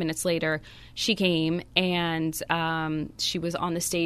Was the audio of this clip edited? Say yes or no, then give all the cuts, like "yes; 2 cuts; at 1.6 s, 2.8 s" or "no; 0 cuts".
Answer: no; 0 cuts